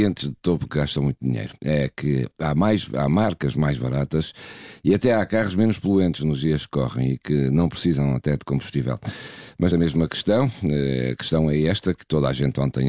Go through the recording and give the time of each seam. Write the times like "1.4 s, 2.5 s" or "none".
9.7 s

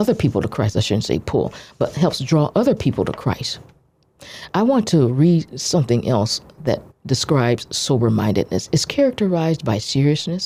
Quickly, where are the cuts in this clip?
6.6 s, 6.9 s

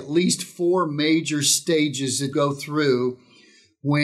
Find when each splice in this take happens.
2.3 s

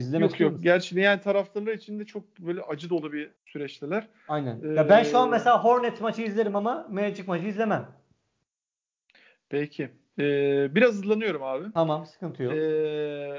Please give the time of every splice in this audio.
3.4 s

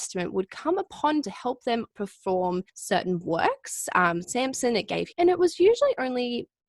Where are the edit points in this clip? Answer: 1.2 s, 1.9 s, 2.7 s, 4.2 s, 5.1 s

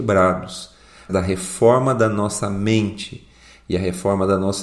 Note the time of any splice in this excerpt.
1.1 s

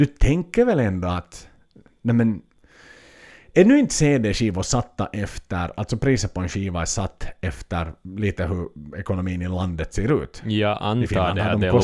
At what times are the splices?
none

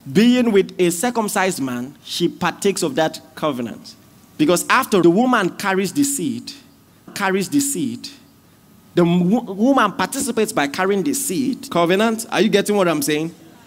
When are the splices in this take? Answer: 2.0 s, 4.0 s, 5.0 s, 7.1 s, 11.7 s

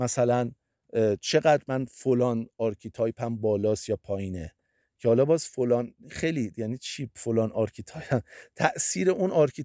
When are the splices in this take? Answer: none

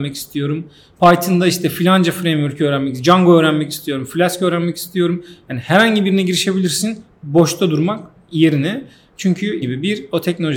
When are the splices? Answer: 9.6 s

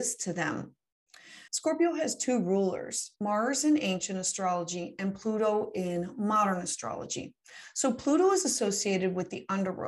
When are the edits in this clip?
1.5 s, 3.2 s

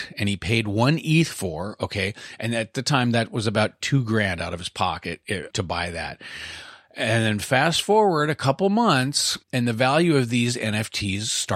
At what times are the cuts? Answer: 3.8 s, 5.5 s, 9.4 s

